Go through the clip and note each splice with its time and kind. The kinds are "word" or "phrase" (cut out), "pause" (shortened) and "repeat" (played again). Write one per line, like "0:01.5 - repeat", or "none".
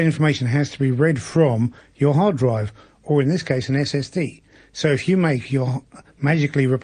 none